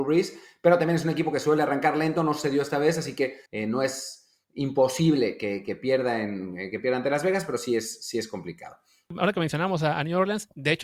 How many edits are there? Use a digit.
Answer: 2